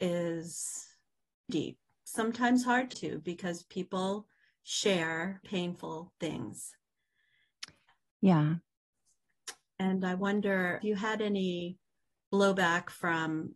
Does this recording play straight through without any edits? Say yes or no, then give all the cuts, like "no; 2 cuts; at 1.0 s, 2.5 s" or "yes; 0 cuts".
no; 4 cuts; at 1.5 s, 2.9 s, 5.4 s, 10.8 s